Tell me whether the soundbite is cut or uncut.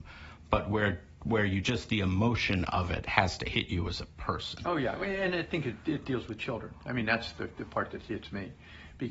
uncut